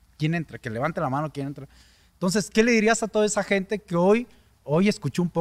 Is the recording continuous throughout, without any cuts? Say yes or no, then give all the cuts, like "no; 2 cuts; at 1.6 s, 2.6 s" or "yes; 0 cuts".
yes; 0 cuts